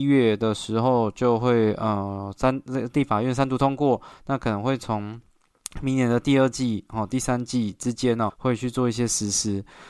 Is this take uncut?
no; 1 cut; at 8.3 s

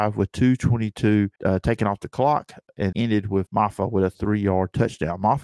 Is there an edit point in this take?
yes; 3 cuts; at 1.3 s, 2.9 s, 3.5 s

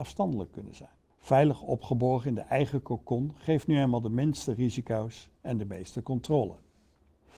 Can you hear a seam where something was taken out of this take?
yes; 1 cut; at 1.1 s

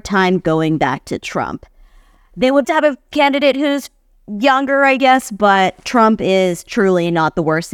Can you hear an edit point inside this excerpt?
yes; 1 cut; at 2.6 s

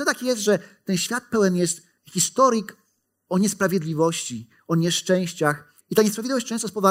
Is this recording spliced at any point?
yes; 2 cuts; at 2.0 s, 5.8 s

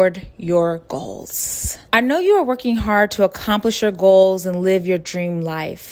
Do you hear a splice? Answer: yes; 1 cut; at 1.9 s

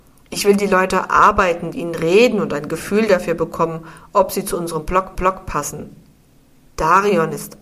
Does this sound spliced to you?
yes; 2 cuts; at 1.7 s, 5.2 s

